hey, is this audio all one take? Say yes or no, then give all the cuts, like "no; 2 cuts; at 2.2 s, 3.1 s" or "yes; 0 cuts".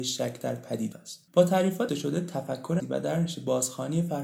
no; 4 cuts; at 0.9 s, 1.3 s, 1.9 s, 2.8 s